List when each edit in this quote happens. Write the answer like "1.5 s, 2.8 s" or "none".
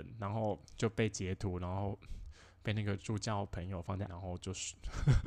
4.1 s

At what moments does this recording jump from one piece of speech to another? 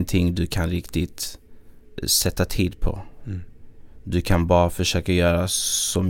none

